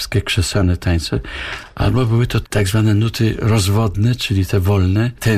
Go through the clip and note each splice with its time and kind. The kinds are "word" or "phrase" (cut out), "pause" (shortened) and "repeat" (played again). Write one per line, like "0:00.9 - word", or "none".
0:02.4 - word